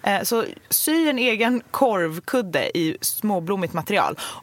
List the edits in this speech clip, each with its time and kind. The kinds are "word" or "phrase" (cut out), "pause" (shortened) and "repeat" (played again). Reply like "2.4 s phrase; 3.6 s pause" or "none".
none